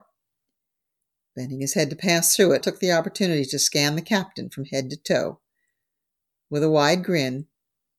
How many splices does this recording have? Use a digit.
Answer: 1